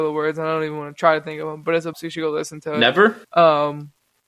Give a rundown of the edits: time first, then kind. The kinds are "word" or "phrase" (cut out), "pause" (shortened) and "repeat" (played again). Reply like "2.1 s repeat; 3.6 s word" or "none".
1.9 s word; 3.2 s pause

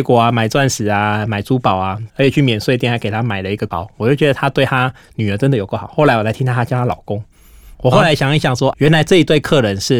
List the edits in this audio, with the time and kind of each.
2.1 s phrase; 3.7 s word; 8.7 s word

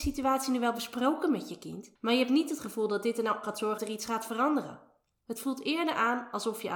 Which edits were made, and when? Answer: 2.0 s pause; 3.4 s phrase; 3.8 s word

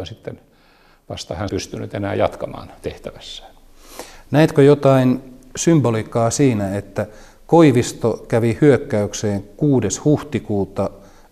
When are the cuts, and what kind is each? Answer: 1.5 s phrase

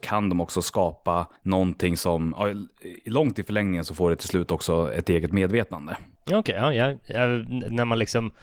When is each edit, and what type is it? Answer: 1.4 s pause

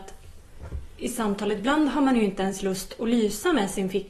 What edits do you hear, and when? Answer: none

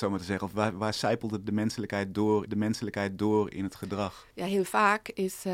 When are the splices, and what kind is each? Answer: 2.5 s repeat; 4.3 s pause

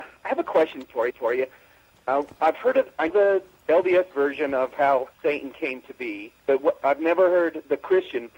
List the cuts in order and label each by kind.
1.1 s repeat; 3.1 s word; 5.1 s pause; 6.4 s pause

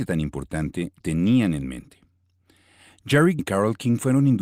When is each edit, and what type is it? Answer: 1.0 s word; 3.4 s word

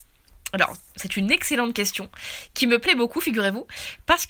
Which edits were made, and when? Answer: none

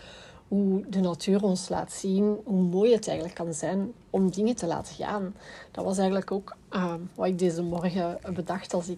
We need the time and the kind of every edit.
4.0 s pause

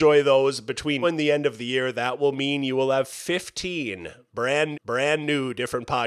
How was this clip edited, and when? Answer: 1.0 s word; 4.7 s repeat

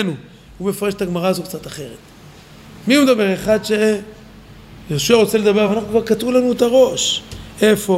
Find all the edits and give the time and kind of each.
none

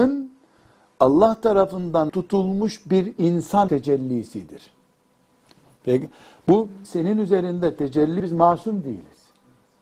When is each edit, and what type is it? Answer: 2.1 s word; 3.7 s word; 6.8 s word; 8.2 s word

